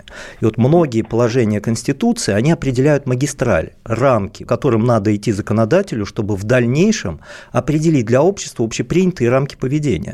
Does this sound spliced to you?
yes; 1 cut; at 4.5 s

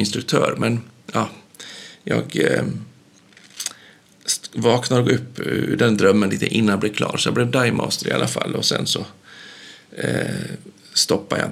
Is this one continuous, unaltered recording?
yes; 0 cuts

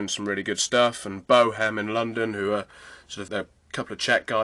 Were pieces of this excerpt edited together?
yes; 1 cut; at 3.3 s

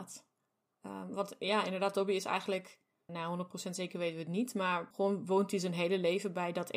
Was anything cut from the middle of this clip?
yes; 1 cut; at 3.1 s

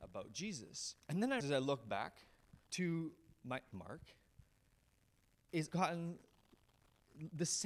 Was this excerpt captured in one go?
no; 5 cuts; at 1.0 s, 1.4 s, 2.6 s, 3.7 s, 5.7 s

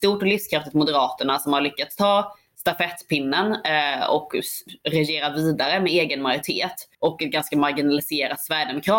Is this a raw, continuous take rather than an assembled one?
no; 1 cut; at 6.9 s

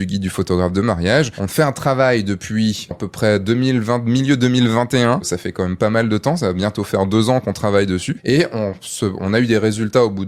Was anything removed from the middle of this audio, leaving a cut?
yes; 1 cut; at 2.9 s

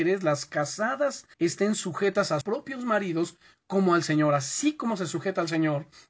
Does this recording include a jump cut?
yes; 2 cuts; at 1.3 s, 2.4 s

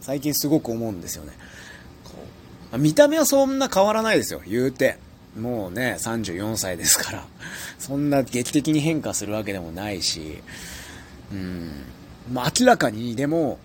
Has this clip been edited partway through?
no; 0 cuts

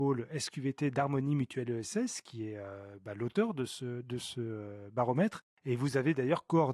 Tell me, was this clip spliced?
yes; 1 cut; at 4.0 s

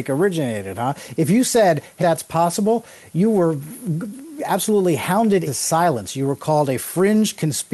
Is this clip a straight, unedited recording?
no; 3 cuts; at 2.0 s, 4.4 s, 5.5 s

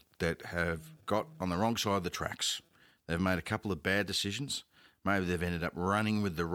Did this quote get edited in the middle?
no; 0 cuts

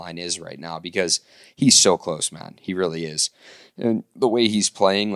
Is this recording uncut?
yes; 0 cuts

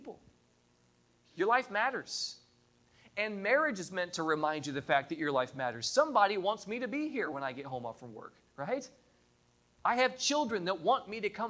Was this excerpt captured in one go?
yes; 0 cuts

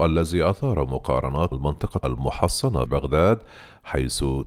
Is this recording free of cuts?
no; 3 cuts; at 1.5 s, 2.0 s, 2.9 s

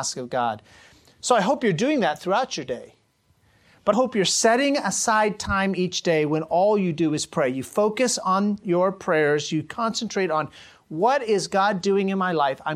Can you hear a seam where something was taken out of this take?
yes; 1 cut; at 3.9 s

